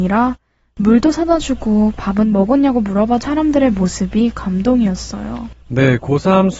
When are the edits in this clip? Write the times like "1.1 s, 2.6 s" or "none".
3.2 s, 5.6 s